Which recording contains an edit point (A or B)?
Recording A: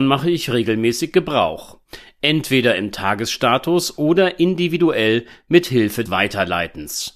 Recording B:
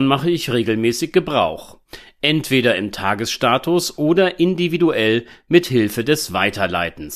A